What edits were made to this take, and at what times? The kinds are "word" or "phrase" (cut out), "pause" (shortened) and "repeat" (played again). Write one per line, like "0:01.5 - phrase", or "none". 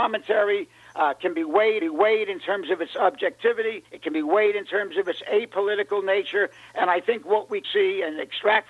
0:01.8 - repeat
0:03.9 - pause
0:07.6 - word